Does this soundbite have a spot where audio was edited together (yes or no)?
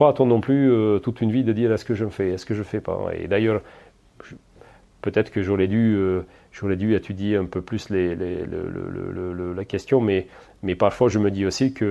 no